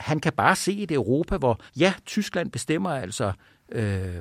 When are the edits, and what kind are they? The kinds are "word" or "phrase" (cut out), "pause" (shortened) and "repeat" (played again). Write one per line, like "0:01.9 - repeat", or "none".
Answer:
0:01.7 - pause